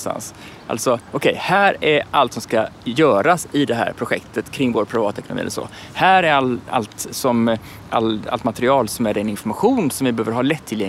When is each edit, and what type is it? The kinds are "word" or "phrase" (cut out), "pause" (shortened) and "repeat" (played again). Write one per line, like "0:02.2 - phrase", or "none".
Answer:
none